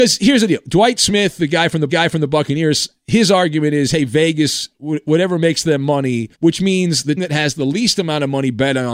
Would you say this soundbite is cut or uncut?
cut